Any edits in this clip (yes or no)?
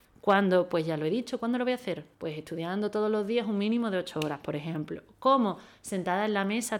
yes